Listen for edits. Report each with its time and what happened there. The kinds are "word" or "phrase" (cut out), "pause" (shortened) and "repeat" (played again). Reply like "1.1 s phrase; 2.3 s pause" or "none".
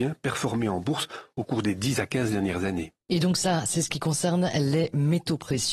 3.0 s pause